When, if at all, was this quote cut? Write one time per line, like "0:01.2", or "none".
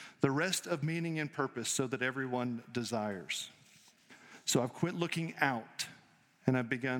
none